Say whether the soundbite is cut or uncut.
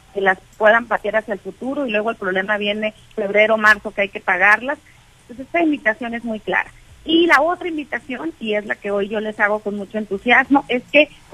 cut